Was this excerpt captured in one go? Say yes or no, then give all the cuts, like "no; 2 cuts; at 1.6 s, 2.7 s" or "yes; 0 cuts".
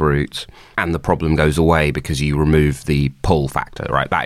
yes; 0 cuts